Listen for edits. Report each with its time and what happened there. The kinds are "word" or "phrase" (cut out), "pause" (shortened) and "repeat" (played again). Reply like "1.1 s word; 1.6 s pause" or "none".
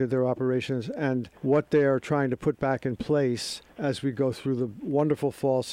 1.4 s pause; 3.7 s pause